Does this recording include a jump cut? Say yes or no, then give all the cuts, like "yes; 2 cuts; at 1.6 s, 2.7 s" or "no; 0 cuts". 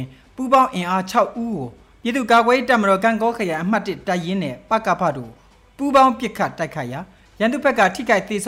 no; 0 cuts